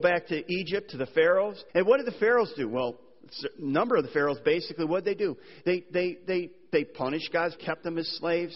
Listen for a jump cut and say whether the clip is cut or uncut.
cut